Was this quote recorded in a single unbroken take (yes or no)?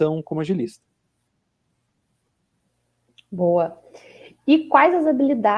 yes